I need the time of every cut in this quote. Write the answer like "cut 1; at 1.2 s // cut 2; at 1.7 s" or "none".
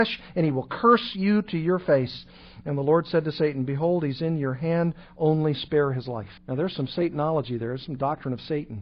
cut 1; at 6.4 s